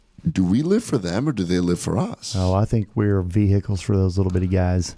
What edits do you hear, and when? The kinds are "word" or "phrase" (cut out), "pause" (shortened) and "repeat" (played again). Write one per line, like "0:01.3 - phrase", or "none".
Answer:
none